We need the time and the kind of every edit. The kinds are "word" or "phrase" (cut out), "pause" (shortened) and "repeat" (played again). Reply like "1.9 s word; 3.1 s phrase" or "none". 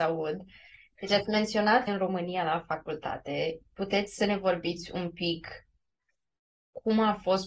1.9 s phrase